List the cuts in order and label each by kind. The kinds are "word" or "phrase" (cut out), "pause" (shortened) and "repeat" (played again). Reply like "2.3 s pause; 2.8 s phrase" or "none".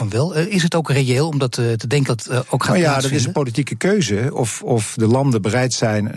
2.1 s word